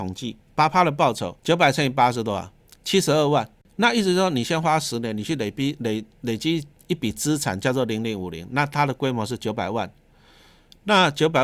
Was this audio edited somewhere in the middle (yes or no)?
yes